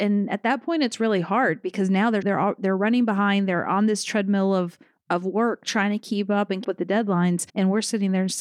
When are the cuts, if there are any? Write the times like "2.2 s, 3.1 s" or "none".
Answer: 2.2 s, 6.6 s, 7.5 s